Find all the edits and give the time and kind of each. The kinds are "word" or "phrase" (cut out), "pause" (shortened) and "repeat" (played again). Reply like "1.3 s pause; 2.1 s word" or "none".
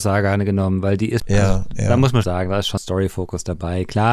1.2 s word; 2.2 s word; 2.8 s word